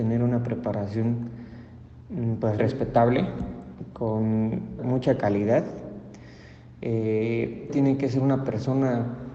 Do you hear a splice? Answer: yes; 3 cuts; at 2.6 s, 4.8 s, 7.7 s

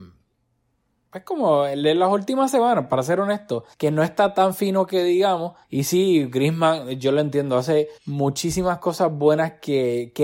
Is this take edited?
yes; 3 cuts; at 3.7 s, 5.6 s, 8.0 s

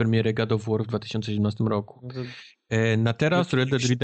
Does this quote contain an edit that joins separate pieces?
no; 0 cuts

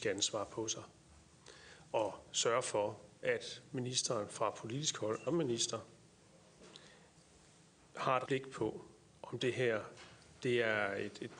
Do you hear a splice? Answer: yes; 2 cuts; at 5.3 s, 8.3 s

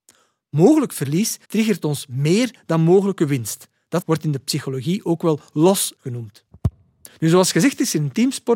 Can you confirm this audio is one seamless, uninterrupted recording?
no; 3 cuts; at 1.4 s, 4.0 s, 6.0 s

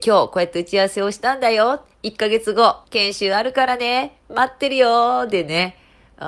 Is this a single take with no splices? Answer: no; 2 cuts; at 1.9 s, 2.8 s

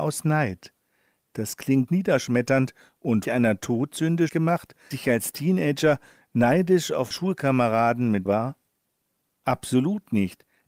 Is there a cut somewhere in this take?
yes; 6 cuts; at 1.9 s, 3.2 s, 4.3 s, 4.9 s, 7.1 s, 8.3 s

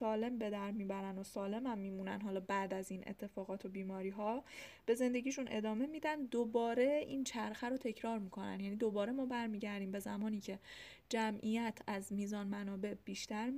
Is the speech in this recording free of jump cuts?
yes; 0 cuts

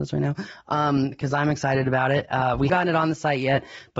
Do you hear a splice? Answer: yes; 1 cut; at 2.7 s

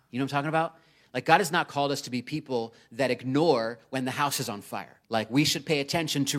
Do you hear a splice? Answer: yes; 1 cut; at 5.0 s

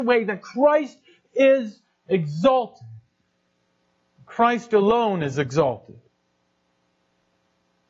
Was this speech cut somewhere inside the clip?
no; 0 cuts

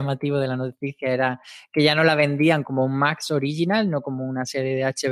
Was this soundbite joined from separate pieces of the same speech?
no; 0 cuts

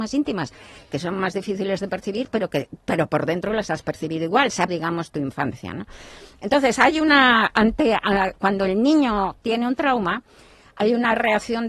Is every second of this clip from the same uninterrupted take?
no; 1 cut; at 4.7 s

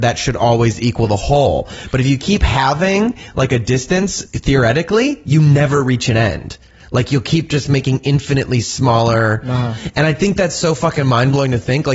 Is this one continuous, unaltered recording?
yes; 0 cuts

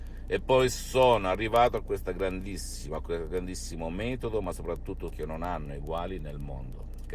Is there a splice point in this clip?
yes; 1 cut; at 5.1 s

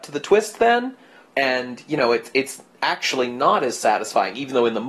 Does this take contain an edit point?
no; 0 cuts

